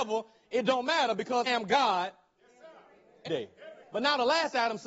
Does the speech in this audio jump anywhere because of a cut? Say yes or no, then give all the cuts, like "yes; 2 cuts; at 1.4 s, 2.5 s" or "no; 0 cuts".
yes; 3 cuts; at 1.5 s, 3.3 s, 3.8 s